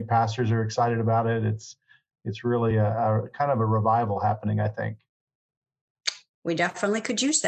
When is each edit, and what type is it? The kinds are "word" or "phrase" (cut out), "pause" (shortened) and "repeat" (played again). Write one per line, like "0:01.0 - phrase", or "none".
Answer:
none